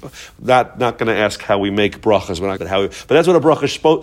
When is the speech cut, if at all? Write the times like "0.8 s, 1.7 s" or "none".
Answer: 2.6 s